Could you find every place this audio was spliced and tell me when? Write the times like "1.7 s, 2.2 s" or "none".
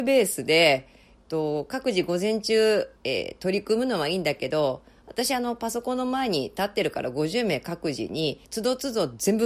3.0 s, 8.5 s

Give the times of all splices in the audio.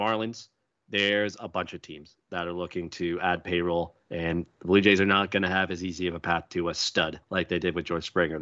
4.0 s, 7.2 s

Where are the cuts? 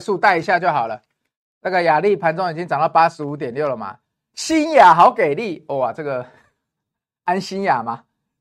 none

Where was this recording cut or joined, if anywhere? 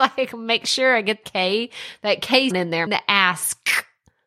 1.2 s, 2.5 s, 2.9 s

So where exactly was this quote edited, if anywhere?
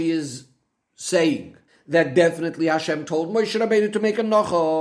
1.7 s

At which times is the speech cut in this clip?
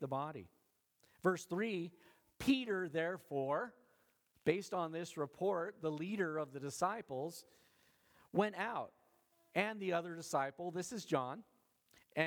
none

